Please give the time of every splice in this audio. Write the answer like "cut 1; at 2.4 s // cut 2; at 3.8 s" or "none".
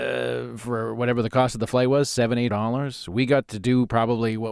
cut 1; at 2.5 s